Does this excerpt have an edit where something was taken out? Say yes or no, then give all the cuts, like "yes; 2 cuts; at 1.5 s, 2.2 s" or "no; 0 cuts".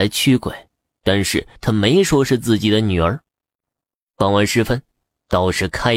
yes; 1 cut; at 1.6 s